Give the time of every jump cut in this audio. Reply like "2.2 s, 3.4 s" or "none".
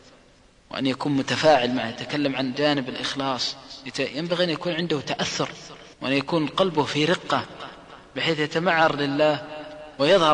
5.9 s